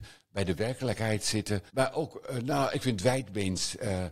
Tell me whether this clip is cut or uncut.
cut